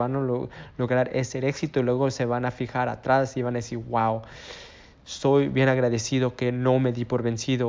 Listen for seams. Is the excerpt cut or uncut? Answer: uncut